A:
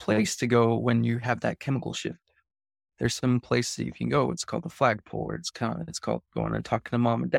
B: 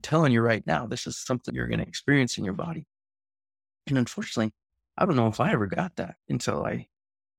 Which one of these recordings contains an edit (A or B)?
B